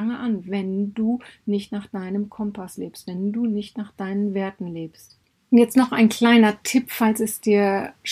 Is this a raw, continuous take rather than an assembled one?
yes; 0 cuts

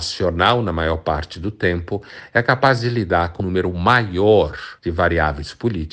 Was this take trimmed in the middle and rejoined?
yes; 2 cuts; at 3.4 s, 4.8 s

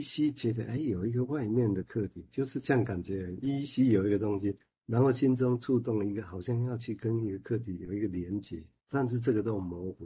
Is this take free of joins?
no; 1 cut; at 8.8 s

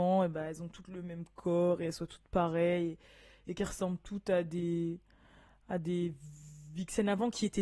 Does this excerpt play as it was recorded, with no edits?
yes; 0 cuts

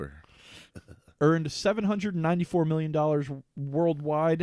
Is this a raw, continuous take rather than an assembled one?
yes; 0 cuts

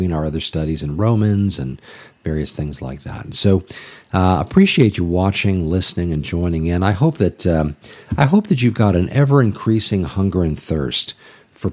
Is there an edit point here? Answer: no; 0 cuts

